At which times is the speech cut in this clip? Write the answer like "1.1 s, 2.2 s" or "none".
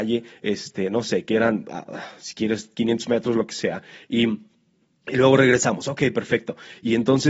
none